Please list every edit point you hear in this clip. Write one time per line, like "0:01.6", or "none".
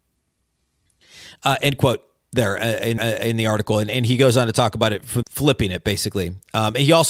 0:03.0
0:05.2